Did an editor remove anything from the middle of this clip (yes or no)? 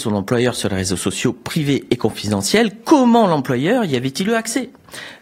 no